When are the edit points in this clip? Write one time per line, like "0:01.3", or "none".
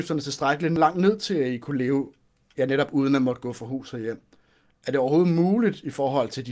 none

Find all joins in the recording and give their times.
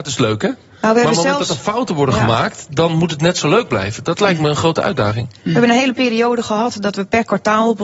none

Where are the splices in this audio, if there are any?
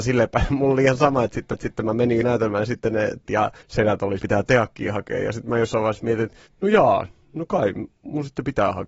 0:01.5
0:02.2
0:03.3
0:03.6
0:04.2
0:06.5

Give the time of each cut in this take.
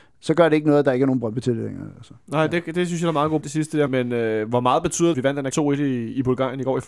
0:03.4
0:03.9
0:05.1
0:05.5

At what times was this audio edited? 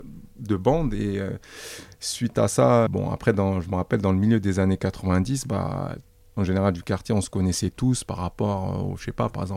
0:02.9
0:06.4

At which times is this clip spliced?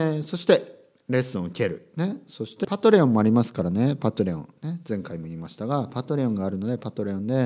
0:02.6

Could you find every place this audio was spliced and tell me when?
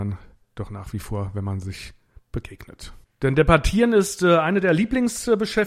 none

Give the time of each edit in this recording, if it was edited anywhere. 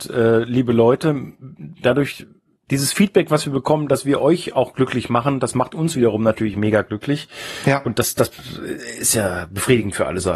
none

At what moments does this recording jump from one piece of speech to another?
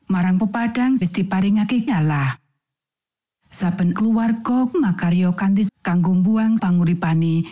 0:01.0
0:01.9
0:03.9
0:04.7
0:05.7
0:06.6

